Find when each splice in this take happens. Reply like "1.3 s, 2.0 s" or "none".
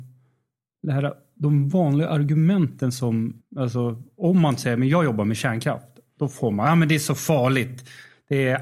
3.4 s

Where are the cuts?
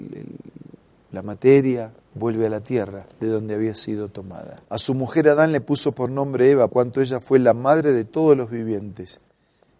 2.0 s, 3.1 s, 4.7 s, 6.7 s

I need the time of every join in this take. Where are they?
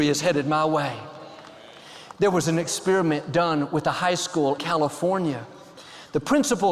4.6 s

